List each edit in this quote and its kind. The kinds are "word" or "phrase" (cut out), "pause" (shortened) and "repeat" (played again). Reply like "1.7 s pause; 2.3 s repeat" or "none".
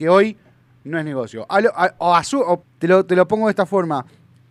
2.0 s word; 2.6 s phrase